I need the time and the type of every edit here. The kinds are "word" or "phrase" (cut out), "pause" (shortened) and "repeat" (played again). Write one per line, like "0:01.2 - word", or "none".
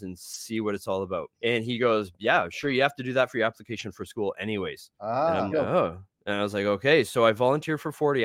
0:01.3 - pause
0:04.9 - pause
0:05.5 - word